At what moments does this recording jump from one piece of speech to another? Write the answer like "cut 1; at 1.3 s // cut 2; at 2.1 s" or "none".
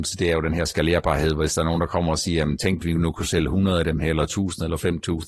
cut 1; at 2.8 s